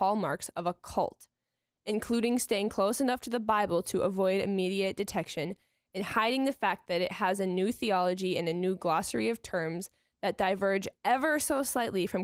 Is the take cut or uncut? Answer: uncut